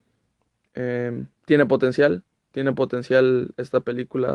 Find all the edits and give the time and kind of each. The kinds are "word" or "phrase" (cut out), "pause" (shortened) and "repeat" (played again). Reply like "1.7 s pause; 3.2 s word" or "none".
1.3 s pause